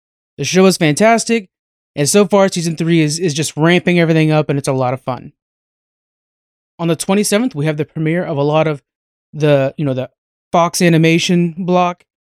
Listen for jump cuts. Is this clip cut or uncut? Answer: uncut